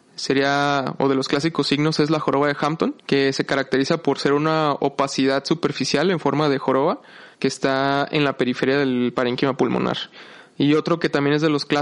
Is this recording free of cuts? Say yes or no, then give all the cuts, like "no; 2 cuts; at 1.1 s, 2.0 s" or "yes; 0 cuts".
no; 2 cuts; at 3.0 s, 7.3 s